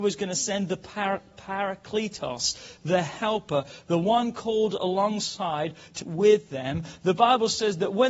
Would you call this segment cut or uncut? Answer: cut